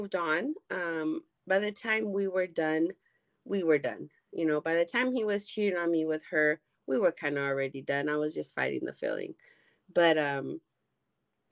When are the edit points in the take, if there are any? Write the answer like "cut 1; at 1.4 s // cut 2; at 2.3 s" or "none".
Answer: none